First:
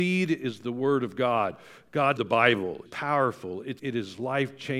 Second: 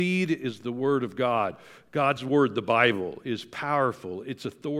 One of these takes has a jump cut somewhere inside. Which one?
first; 3 cuts; at 2.2 s, 2.9 s, 3.8 s

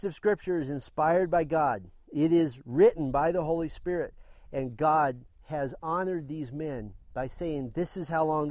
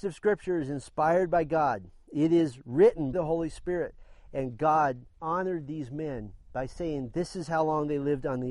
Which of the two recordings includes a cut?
second; 2 cuts; at 3.1 s, 5.2 s

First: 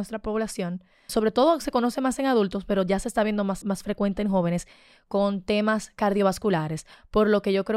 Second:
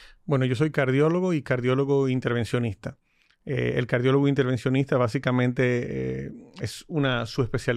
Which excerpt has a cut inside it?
first; 2 cuts; at 1.1 s, 3.6 s

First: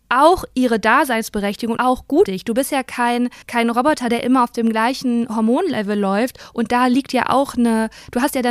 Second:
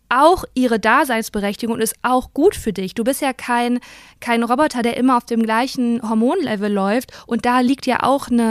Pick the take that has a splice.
first; 3 cuts; at 1.8 s, 2.2 s, 3.4 s

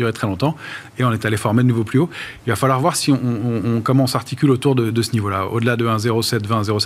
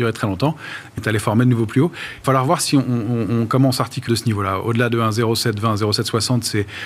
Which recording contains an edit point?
second; 3 cuts; at 1.0 s, 2.2 s, 4.1 s

